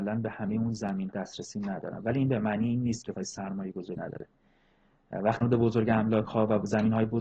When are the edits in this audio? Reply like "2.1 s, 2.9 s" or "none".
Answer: 1.1 s, 3.1 s, 3.9 s, 5.4 s